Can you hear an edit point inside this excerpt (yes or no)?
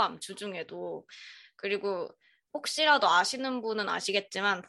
no